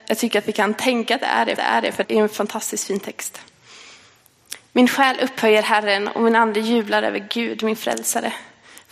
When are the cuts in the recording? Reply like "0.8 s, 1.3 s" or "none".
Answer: 1.6 s, 2.0 s